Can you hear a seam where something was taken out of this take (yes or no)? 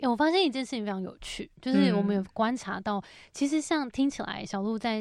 no